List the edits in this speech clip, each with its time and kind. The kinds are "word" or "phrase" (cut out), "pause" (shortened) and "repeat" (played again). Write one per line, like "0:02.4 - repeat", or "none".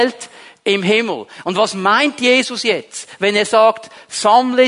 none